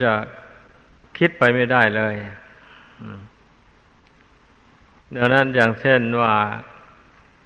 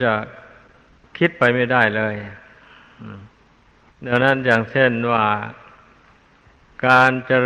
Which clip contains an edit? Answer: second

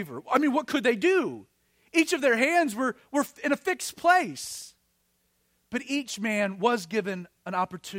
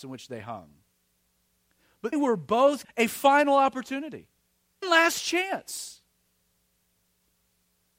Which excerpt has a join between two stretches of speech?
second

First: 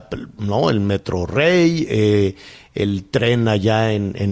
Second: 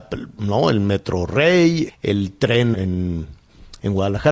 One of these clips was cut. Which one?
second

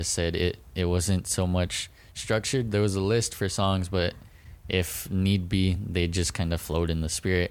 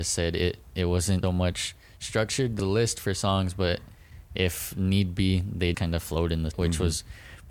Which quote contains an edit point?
second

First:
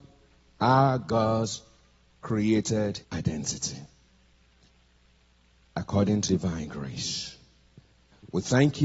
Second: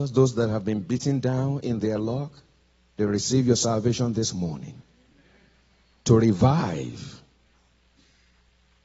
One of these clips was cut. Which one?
first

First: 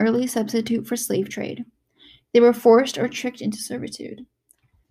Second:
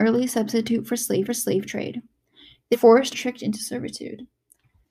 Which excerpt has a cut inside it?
second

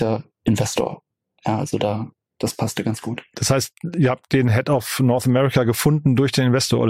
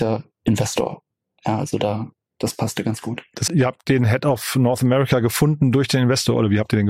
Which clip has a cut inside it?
second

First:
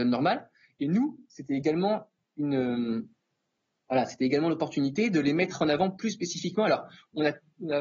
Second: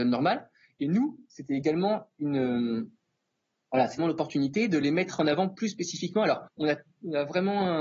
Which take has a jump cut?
second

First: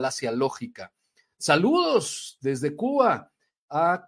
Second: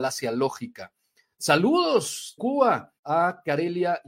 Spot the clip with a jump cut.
second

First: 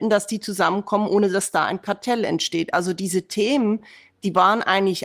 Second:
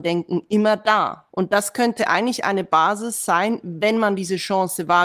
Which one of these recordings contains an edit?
second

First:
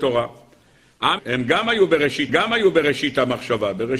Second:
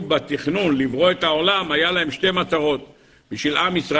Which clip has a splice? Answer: first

